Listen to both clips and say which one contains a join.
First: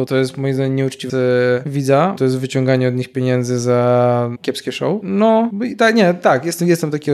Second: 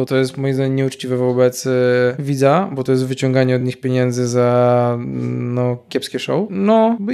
first; 3 cuts; at 1.1 s, 2.2 s, 4.4 s

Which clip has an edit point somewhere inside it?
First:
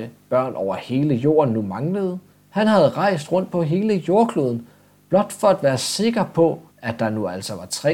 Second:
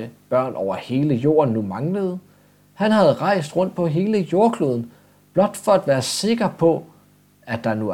first; 2 cuts; at 2.3 s, 6.7 s

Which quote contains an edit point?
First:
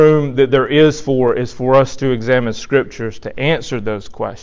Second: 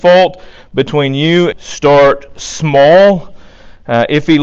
second; 1 cut; at 1.5 s

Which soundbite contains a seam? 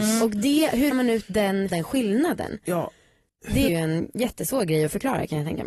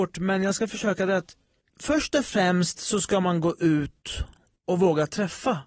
first; 3 cuts; at 0.9 s, 1.7 s, 3.7 s

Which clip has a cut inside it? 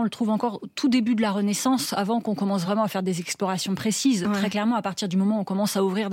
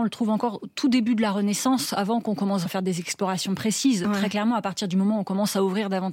second; 1 cut; at 2.7 s

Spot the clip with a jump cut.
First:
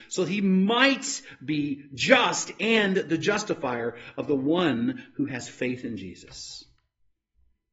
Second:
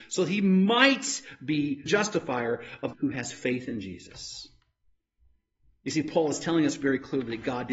second; 2 cuts; at 1.9 s, 2.9 s

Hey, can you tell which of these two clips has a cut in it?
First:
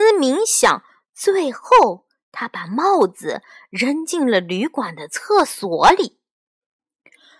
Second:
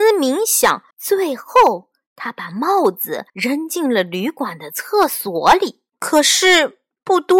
second; 3 cuts; at 0.9 s, 3.3 s, 5.9 s

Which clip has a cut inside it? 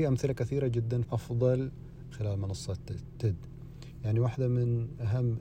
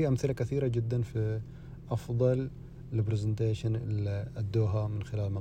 first; 2 cuts; at 1.0 s, 2.1 s

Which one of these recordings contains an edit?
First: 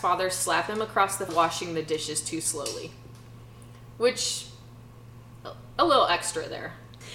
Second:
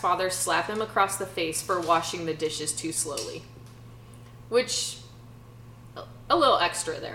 first; 1 cut; at 1.3 s

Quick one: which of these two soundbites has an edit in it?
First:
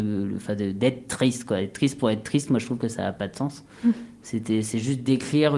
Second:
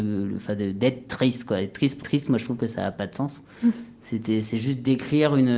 second; 1 cut; at 2.0 s

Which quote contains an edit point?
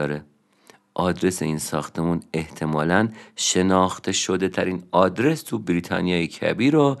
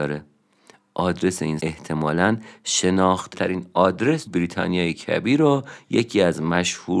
second; 3 cuts; at 1.6 s, 3.3 s, 4.3 s

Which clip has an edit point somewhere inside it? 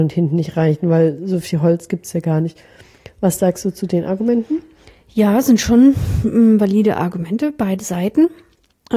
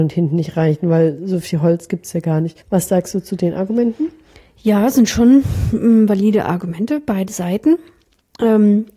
second; 1 cut; at 2.6 s

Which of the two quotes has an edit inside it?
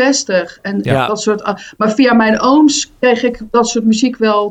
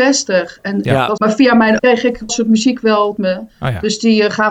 second; 4 cuts; at 1.2 s, 1.8 s, 2.3 s, 3.2 s

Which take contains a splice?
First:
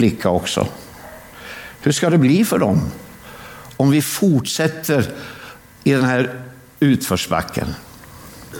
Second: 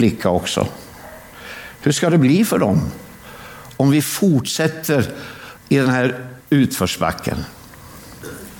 second; 2 cuts; at 5.6 s, 6.4 s

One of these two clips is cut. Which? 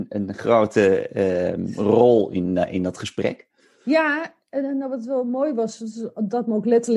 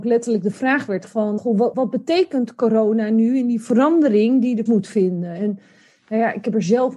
second; 4 cuts; at 1.1 s, 1.4 s, 1.7 s, 4.7 s

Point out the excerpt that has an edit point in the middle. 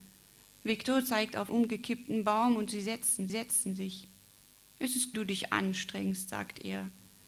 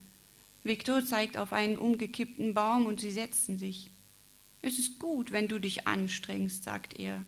first; 3 cuts; at 1.5 s, 3.3 s, 5.1 s

